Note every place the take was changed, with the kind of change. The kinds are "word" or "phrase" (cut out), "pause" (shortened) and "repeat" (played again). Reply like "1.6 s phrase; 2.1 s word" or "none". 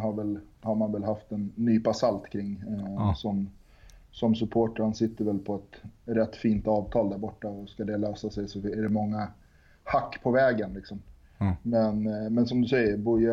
none